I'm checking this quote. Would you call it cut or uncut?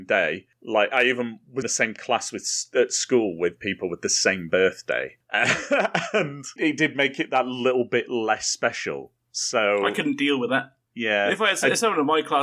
cut